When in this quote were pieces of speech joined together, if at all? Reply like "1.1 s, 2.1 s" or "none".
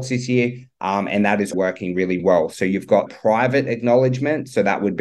1.5 s, 2.2 s, 3.1 s